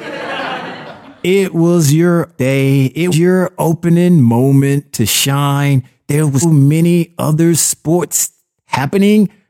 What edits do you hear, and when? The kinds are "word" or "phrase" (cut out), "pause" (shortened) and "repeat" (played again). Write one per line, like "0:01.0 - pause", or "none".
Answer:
0:02.4 - word
0:03.1 - word
0:06.4 - word